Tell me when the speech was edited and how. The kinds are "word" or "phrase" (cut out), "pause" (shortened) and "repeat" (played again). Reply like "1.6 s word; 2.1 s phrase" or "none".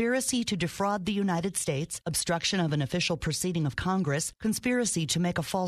none